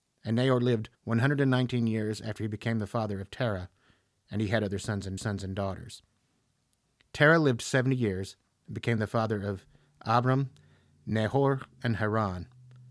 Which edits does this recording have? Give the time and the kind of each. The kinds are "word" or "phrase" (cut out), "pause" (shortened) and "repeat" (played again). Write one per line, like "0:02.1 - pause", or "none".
0:00.9 - pause
0:05.2 - repeat